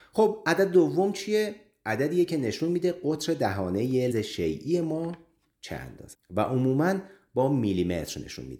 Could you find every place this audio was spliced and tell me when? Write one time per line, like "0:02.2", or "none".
0:04.1
0:06.1